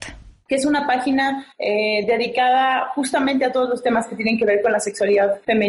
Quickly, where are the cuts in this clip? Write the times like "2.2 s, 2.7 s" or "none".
1.5 s